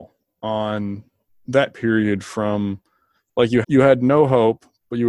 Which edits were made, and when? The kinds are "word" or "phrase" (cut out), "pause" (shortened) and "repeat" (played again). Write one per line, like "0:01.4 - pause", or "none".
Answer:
0:01.7 - word
0:03.6 - word